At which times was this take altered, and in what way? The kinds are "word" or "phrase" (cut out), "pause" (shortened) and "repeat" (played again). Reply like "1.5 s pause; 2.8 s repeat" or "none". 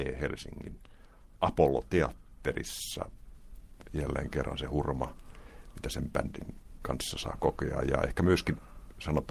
none